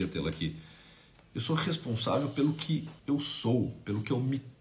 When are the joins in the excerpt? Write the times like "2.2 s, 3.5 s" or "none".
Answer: 3.0 s